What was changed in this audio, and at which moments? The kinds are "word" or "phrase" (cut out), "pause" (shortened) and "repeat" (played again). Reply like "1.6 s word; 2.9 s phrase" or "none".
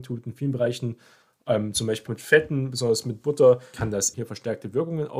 2.1 s word; 3.7 s word; 4.1 s word